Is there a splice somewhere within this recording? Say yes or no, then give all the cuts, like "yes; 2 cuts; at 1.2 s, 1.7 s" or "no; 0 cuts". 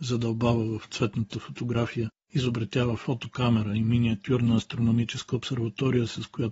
no; 0 cuts